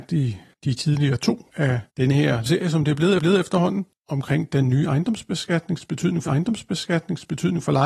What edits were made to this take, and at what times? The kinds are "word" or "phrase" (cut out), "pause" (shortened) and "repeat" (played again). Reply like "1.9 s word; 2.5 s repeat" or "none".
1.5 s word; 1.9 s pause; 2.5 s word; 3.2 s repeat; 6.3 s repeat